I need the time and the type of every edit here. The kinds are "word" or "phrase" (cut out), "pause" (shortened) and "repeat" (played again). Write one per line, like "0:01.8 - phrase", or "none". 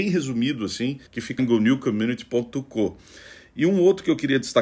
0:01.1 - pause
0:01.4 - word